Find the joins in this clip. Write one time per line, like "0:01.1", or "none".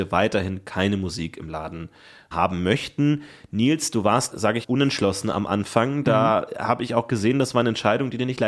0:02.3
0:04.3
0:04.6